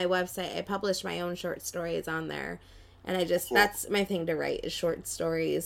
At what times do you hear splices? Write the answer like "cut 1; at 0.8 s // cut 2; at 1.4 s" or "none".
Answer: cut 1; at 4.1 s